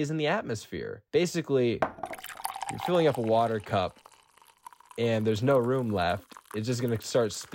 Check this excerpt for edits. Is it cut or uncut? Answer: cut